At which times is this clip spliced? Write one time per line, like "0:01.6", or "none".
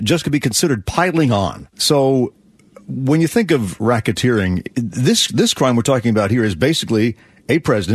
none

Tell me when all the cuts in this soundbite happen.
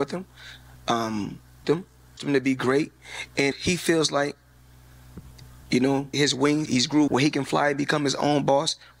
0:01.6
0:02.2
0:03.5
0:06.1
0:06.7
0:07.1

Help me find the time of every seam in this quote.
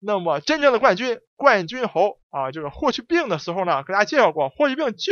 0:02.2

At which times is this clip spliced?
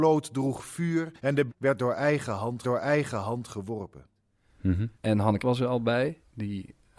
0:01.2
0:01.5
0:02.6
0:05.0
0:05.4

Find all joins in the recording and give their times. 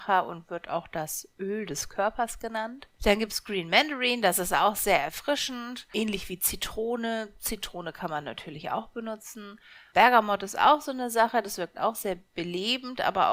none

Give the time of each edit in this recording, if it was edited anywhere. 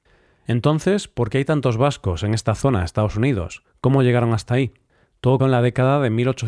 0:05.4

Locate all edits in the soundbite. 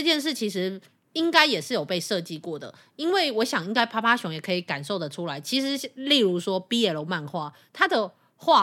none

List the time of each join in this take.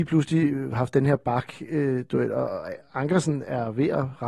none

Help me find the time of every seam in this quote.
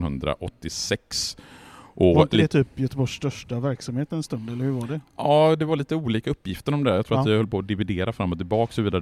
none

